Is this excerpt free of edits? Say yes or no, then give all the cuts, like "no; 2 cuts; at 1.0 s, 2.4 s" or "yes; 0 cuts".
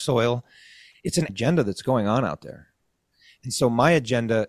no; 1 cut; at 1.3 s